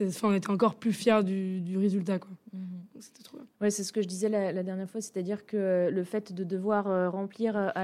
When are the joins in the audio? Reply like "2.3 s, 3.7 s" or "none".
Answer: 3.5 s